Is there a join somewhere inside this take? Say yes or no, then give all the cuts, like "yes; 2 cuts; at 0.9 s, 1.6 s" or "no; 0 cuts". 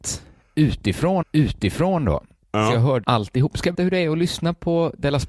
yes; 3 cuts; at 1.2 s, 3.0 s, 3.7 s